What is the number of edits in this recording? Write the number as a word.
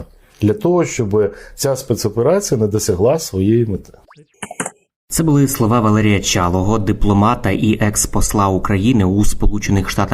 zero